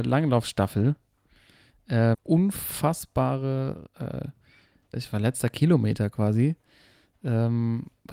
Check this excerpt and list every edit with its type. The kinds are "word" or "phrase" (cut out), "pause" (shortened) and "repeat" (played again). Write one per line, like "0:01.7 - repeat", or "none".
0:02.1 - word
0:04.9 - word